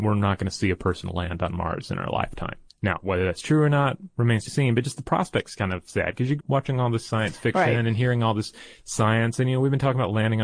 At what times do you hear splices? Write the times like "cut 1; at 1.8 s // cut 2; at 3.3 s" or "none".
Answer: cut 1; at 2.7 s // cut 2; at 4.5 s // cut 3; at 6.4 s